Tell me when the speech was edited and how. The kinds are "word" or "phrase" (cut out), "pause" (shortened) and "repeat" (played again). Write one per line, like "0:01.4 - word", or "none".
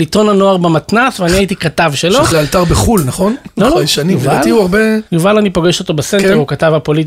0:02.3 - word
0:05.1 - pause